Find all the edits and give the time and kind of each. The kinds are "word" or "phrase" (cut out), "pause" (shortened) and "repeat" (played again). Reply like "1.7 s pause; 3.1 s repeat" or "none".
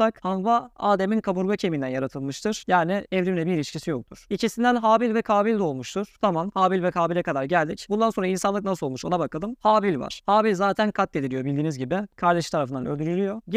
none